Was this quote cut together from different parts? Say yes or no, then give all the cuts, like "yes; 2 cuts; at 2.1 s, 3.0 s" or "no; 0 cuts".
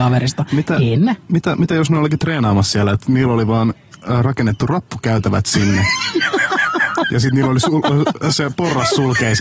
no; 0 cuts